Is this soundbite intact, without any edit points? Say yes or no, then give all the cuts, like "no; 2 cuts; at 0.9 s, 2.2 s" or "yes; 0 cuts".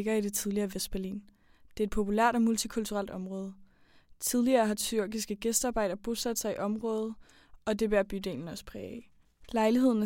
yes; 0 cuts